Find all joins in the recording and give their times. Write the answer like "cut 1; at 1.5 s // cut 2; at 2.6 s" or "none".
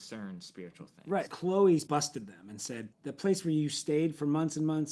cut 1; at 1.3 s // cut 2; at 1.9 s // cut 3; at 2.9 s